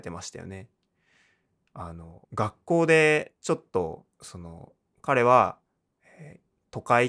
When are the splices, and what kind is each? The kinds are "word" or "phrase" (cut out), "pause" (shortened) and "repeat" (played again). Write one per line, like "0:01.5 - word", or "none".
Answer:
0:02.2 - pause
0:04.1 - pause